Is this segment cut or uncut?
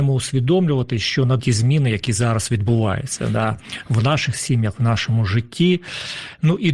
cut